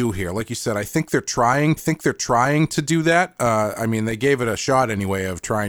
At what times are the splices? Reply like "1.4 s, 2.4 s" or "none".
1.8 s